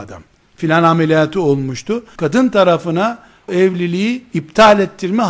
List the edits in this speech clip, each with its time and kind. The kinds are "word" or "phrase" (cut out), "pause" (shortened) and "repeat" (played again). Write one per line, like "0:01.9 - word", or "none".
0:02.2 - word
0:03.5 - word